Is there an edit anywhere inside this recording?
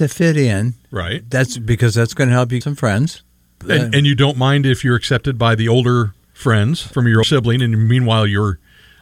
yes; 3 cuts; at 2.6 s, 6.9 s, 7.2 s

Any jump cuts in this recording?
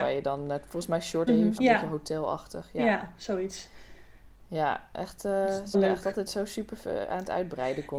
yes; 4 cuts; at 1.3 s, 1.6 s, 5.7 s, 6.3 s

